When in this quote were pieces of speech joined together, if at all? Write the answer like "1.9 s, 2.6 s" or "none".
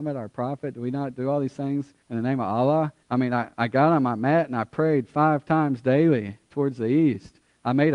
2.0 s, 3.0 s